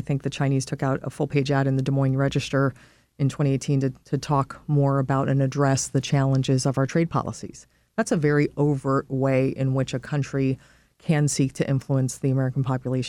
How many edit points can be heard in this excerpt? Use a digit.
0